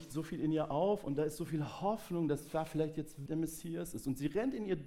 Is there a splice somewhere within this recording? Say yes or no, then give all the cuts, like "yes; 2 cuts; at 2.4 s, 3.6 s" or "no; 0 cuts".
yes; 1 cut; at 3.3 s